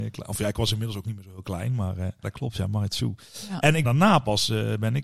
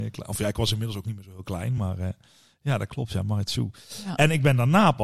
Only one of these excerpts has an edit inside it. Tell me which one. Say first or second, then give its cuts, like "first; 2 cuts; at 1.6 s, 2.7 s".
first; 2 cuts; at 2.2 s, 3.8 s